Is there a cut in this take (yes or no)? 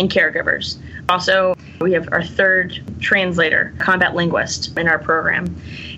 no